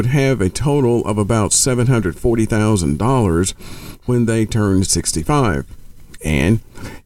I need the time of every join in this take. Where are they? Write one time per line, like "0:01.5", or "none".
none